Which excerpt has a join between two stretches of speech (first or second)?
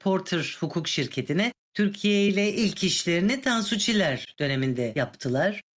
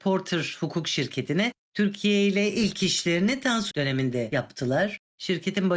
second